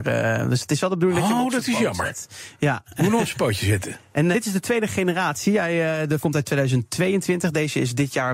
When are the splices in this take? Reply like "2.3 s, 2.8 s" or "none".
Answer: 4.3 s, 6.2 s